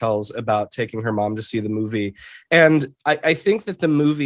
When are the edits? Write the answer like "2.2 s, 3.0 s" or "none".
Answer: none